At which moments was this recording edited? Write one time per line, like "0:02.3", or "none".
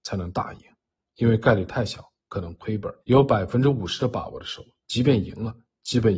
0:03.0